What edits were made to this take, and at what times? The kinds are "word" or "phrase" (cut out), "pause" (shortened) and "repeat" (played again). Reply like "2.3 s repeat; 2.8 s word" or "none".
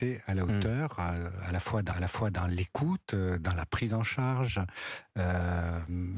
1.9 s repeat